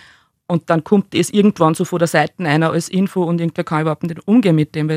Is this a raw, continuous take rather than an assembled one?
yes; 0 cuts

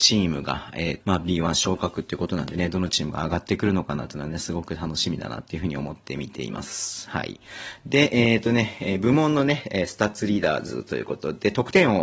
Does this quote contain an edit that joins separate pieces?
yes; 1 cut; at 1.0 s

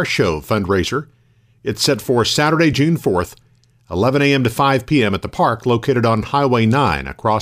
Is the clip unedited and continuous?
yes; 0 cuts

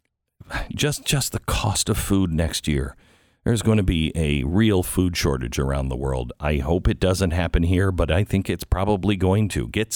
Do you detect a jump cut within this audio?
no; 0 cuts

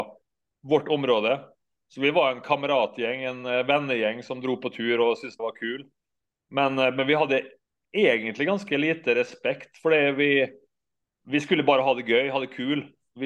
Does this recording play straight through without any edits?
no; 1 cut; at 5.4 s

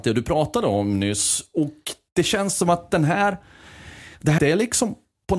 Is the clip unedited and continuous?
no; 1 cut; at 4.4 s

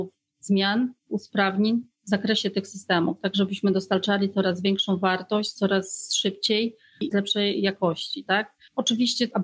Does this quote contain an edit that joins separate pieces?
yes; 1 cut; at 7.1 s

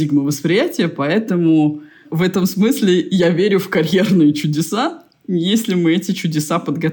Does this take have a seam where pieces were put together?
no; 0 cuts

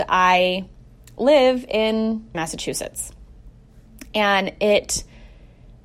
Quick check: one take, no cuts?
no; 1 cut; at 2.3 s

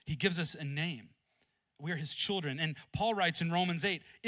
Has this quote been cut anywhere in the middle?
no; 0 cuts

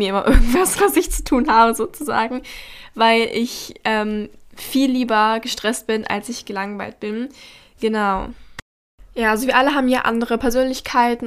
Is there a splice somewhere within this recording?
no; 0 cuts

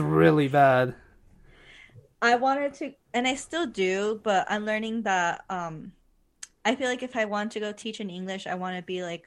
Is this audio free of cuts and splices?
yes; 0 cuts

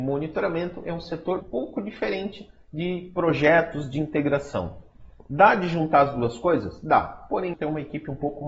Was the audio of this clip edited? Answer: yes; 2 cuts; at 1.4 s, 7.5 s

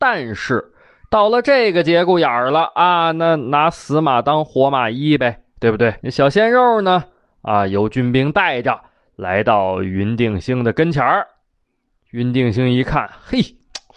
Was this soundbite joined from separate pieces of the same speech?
yes; 1 cut; at 6.0 s

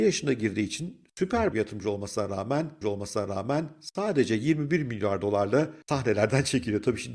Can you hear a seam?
yes; 3 cuts; at 1.5 s, 2.8 s, 5.8 s

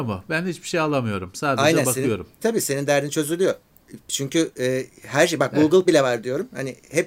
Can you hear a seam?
yes; 2 cuts; at 2.4 s, 5.9 s

